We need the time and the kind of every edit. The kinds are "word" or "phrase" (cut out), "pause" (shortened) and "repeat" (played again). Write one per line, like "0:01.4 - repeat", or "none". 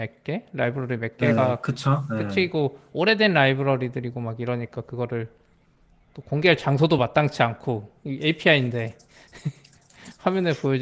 none

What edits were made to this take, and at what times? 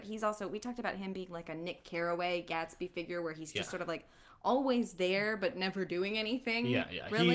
none

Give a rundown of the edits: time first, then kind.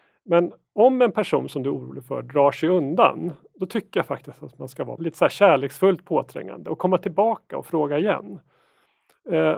0:05.0 - word

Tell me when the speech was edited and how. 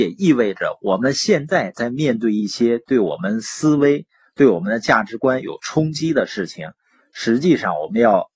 none

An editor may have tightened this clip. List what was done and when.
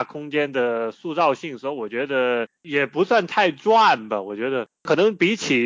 none

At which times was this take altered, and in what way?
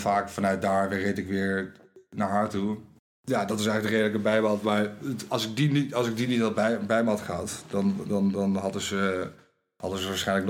0:03.0 - pause

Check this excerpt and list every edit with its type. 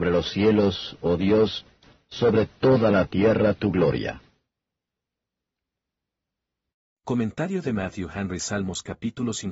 none

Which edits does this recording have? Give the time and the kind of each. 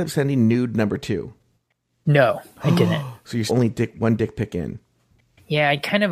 0:01.6 - pause
0:03.5 - word

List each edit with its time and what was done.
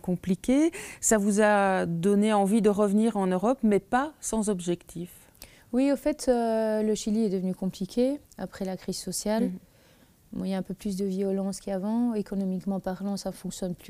0:08.3 - pause

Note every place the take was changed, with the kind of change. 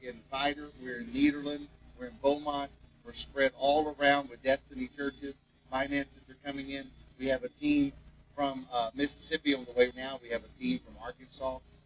0:09.9 - word

